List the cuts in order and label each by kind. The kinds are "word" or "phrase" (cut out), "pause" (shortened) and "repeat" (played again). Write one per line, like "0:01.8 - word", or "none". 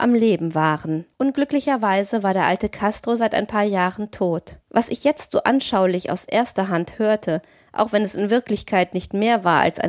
0:01.1 - pause
0:04.6 - pause